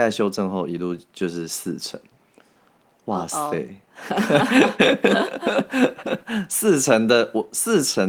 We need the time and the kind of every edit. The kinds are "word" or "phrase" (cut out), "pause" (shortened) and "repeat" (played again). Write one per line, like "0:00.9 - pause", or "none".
none